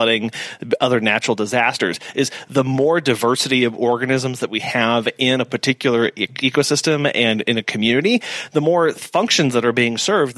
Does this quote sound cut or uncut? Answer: uncut